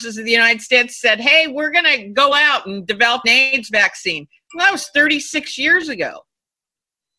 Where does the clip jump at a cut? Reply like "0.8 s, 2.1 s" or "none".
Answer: 2.3 s, 3.2 s